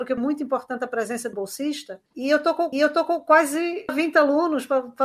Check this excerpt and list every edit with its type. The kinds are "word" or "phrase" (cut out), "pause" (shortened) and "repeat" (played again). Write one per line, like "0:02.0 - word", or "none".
0:01.3 - word
0:02.1 - pause
0:02.7 - repeat